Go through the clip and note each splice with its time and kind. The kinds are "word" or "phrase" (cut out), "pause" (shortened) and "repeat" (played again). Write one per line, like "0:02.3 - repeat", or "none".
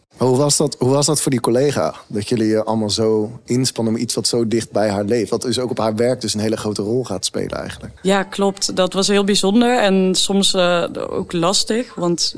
0:08.0 - pause